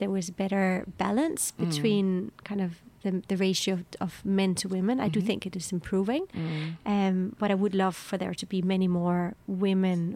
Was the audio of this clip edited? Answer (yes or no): no